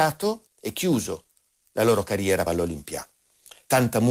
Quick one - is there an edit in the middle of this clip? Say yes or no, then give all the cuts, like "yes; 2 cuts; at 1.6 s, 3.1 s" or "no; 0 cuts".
yes; 1 cut; at 2.5 s